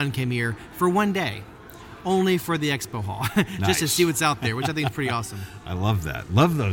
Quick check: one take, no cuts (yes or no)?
yes